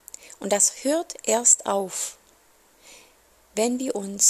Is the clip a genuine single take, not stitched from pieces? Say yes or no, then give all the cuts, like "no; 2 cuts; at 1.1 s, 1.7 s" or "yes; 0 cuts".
yes; 0 cuts